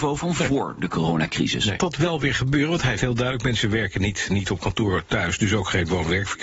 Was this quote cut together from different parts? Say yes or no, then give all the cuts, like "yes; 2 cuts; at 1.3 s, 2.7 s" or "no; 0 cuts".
yes; 3 cuts; at 1.8 s, 3.0 s, 4.3 s